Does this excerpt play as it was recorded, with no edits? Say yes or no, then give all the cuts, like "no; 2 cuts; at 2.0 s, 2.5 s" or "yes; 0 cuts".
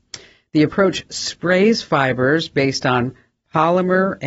yes; 0 cuts